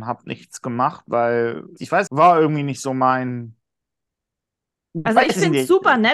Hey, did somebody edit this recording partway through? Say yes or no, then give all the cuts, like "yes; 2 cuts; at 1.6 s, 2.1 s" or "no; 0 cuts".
yes; 2 cuts; at 1.8 s, 2.1 s